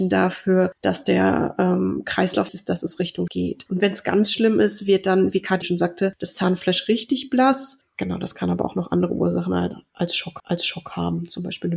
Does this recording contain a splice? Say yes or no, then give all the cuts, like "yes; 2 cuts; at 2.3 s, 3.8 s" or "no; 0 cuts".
yes; 4 cuts; at 2.5 s, 3.3 s, 5.6 s, 10.4 s